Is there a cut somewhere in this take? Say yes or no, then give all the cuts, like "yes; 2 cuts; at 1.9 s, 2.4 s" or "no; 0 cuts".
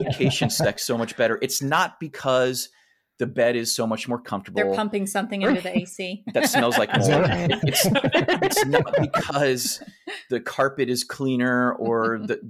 no; 0 cuts